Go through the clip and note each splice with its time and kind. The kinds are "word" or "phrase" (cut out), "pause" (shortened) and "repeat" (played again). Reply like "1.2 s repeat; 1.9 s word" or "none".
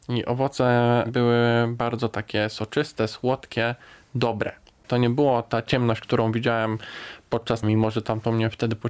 7.6 s word